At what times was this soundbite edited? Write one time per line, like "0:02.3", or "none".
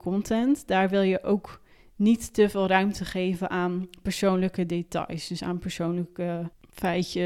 none